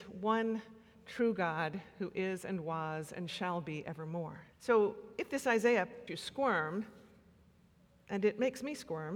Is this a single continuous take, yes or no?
no